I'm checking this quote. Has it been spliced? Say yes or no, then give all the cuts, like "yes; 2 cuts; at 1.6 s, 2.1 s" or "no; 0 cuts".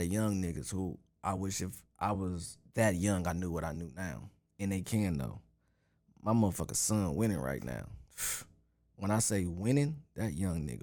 no; 0 cuts